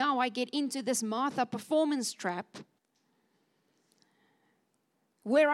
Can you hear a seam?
no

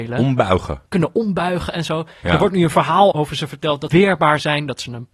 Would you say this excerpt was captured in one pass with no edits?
no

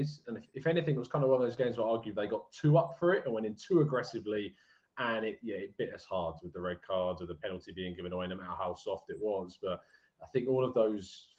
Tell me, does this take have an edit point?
no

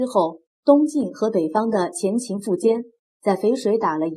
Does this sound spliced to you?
no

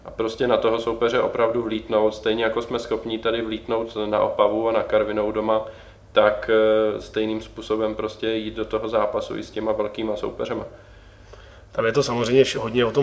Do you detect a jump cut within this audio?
no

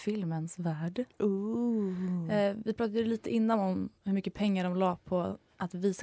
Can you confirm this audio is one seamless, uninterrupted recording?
yes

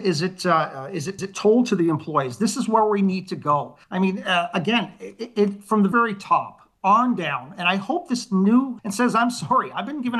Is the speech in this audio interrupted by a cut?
yes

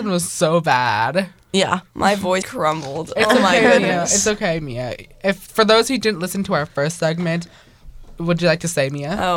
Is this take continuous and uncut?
no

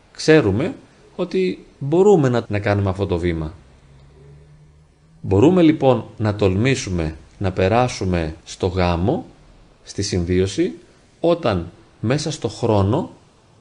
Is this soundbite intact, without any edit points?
no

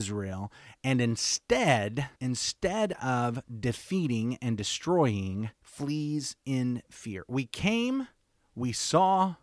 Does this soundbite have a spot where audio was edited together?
yes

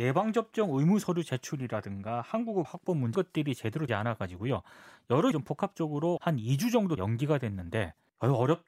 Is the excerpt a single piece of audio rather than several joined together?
no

